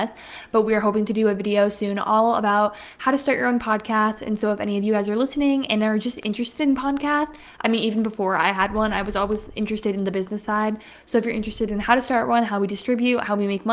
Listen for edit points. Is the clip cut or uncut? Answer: uncut